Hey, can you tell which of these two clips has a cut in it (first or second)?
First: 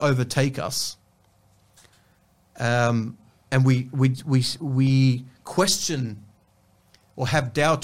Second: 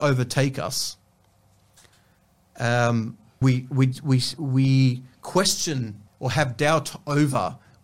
second